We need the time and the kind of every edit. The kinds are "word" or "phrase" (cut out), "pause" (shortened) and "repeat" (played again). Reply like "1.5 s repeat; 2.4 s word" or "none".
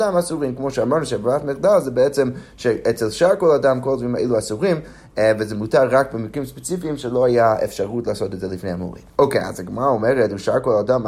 9.1 s pause